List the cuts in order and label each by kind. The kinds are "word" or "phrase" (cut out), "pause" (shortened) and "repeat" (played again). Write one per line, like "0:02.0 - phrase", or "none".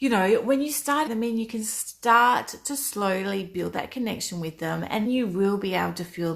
0:01.1 - word
0:05.0 - word